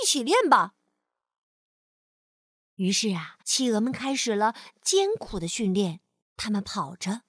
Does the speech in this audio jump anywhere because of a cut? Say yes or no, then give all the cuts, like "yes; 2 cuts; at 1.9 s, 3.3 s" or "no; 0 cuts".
yes; 2 cuts; at 3.4 s, 6.2 s